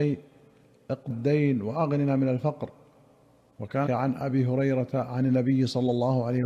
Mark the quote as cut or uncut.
cut